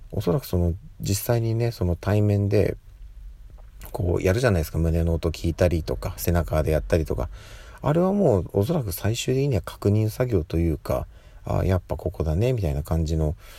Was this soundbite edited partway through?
no; 0 cuts

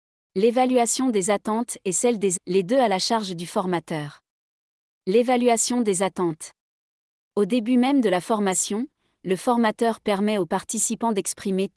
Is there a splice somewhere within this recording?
yes; 1 cut; at 2.4 s

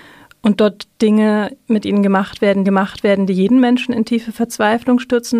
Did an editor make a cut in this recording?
yes; 1 cut; at 2.6 s

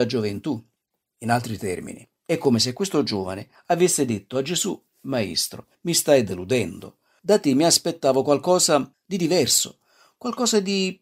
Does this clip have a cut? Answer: no; 0 cuts

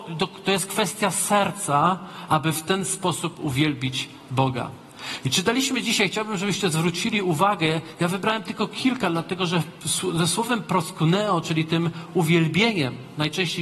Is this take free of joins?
yes; 0 cuts

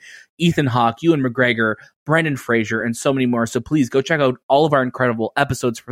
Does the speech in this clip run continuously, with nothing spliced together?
yes; 0 cuts

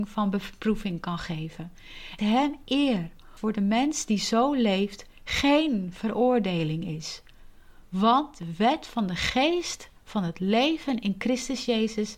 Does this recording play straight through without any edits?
no; 3 cuts; at 2.2 s, 3.4 s, 7.8 s

